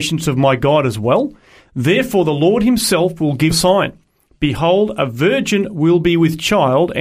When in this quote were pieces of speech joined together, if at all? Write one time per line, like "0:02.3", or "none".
0:03.5